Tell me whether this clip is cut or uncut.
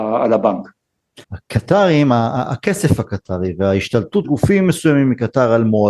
cut